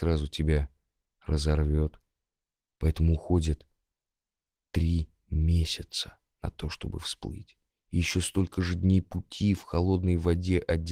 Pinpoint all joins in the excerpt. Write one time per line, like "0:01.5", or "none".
none